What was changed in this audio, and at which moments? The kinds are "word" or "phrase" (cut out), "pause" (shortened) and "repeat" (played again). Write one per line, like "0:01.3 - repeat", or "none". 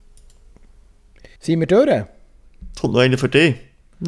0:01.4 - pause